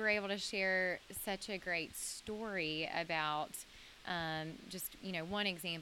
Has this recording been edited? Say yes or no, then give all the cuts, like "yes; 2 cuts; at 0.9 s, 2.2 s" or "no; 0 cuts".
no; 0 cuts